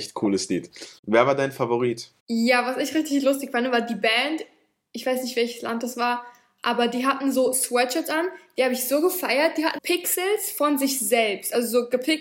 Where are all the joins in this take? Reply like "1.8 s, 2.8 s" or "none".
9.8 s